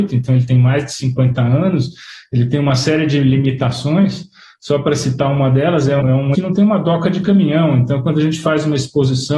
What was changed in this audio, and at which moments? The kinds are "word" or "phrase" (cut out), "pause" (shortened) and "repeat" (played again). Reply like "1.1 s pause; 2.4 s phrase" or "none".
6.0 s word; 6.3 s word

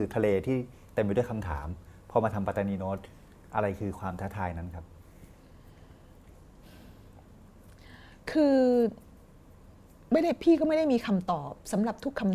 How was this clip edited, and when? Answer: none

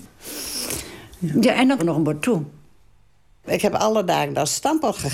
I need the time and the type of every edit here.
1.8 s word; 2.2 s word

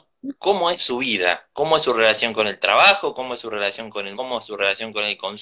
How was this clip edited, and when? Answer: 1.5 s pause; 4.1 s word

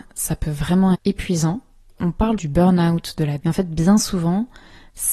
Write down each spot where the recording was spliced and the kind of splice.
0.9 s word; 2.4 s word; 3.4 s word

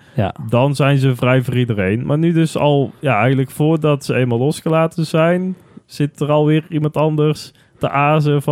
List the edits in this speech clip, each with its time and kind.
none

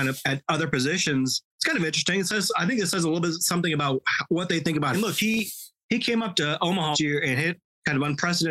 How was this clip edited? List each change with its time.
1.5 s pause; 4.9 s phrase; 6.9 s word

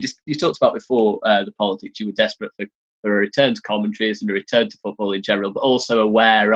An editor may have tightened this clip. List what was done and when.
none

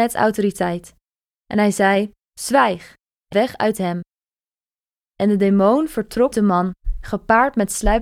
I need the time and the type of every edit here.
3.3 s word; 6.3 s word

